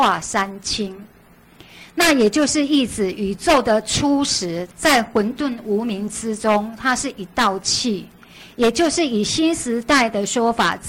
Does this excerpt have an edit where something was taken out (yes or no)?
yes